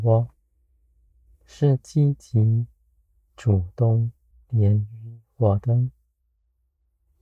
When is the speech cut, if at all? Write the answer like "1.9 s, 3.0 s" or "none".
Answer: 4.3 s